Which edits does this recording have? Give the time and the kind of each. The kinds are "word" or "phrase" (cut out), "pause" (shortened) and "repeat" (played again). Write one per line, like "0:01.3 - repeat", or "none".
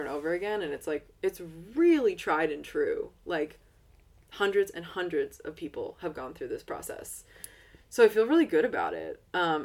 none

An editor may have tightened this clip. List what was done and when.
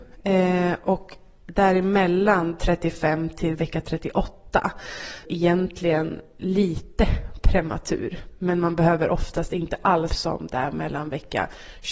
0:05.2 - phrase
0:10.1 - phrase

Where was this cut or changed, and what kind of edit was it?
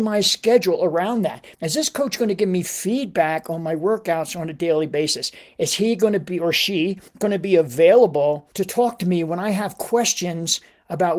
0:01.5 - pause
0:07.1 - pause
0:08.5 - pause

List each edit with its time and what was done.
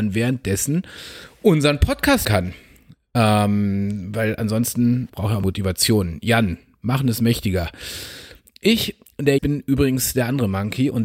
0:02.2 - word
0:05.1 - word
0:05.4 - word
0:09.4 - word

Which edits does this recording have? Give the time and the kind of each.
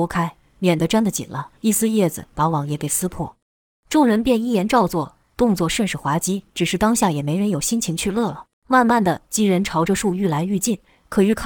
0:01.6 - pause
0:06.5 - pause
0:08.5 - pause

